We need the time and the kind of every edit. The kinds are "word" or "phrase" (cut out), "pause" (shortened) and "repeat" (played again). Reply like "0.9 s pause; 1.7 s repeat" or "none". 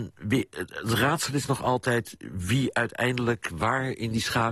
none